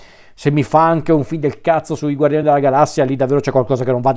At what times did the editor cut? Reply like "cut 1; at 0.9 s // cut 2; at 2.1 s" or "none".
none